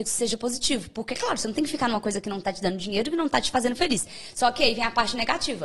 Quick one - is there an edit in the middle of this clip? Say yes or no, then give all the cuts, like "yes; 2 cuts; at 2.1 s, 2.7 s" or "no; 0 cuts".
no; 0 cuts